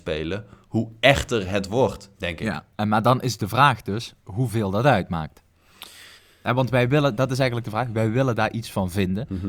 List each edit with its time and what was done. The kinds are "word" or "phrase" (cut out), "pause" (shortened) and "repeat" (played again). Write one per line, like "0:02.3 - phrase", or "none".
0:02.1 - pause
0:06.2 - pause